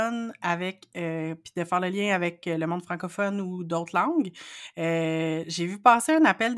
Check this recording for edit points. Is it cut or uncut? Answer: uncut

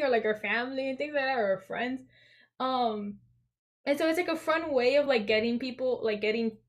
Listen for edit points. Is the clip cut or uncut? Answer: uncut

